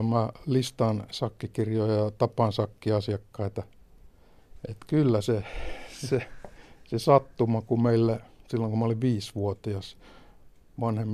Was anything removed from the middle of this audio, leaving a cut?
no; 0 cuts

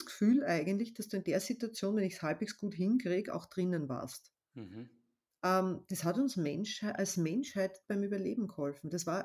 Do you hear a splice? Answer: no; 0 cuts

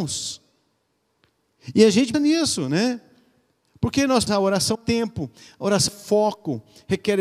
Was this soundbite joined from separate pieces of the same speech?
yes; 4 cuts; at 2.1 s, 4.3 s, 4.7 s, 5.9 s

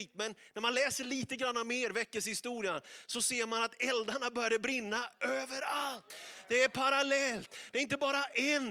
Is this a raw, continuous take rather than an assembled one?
yes; 0 cuts

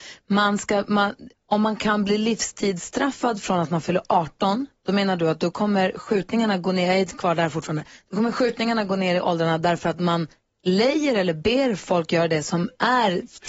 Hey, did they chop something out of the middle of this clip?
yes; 1 cut; at 1.3 s

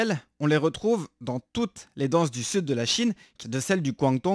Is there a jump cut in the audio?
yes; 1 cut; at 3.4 s

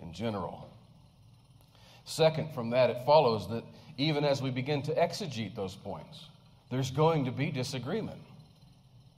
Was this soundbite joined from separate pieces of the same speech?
no; 0 cuts

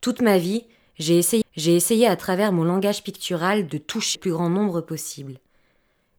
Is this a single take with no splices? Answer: no; 2 cuts; at 1.4 s, 4.2 s

